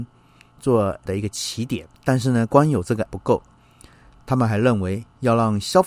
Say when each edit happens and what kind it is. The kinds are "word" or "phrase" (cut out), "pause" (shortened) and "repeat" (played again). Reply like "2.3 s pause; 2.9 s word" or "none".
1.1 s word; 1.9 s pause; 3.1 s word